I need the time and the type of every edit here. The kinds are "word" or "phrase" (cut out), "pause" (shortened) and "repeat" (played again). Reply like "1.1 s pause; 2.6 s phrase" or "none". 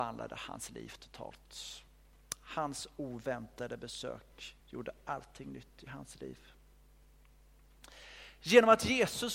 4.6 s pause

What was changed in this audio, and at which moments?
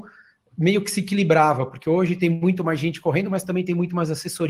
none

